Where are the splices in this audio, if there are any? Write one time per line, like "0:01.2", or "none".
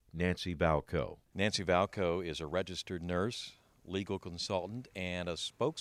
0:01.2